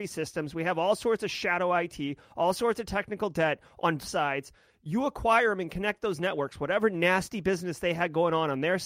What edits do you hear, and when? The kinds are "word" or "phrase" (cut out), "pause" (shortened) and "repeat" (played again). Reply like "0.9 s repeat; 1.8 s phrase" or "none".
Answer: 4.0 s word